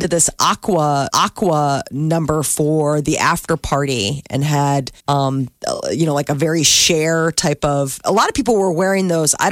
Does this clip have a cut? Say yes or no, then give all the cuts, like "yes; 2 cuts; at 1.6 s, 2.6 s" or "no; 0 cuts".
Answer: yes; 2 cuts; at 1.1 s, 5.0 s